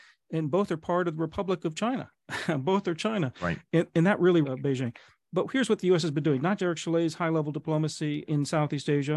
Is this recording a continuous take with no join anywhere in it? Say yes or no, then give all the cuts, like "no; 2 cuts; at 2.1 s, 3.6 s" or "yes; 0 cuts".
no; 3 cuts; at 4.4 s, 6.6 s, 8.3 s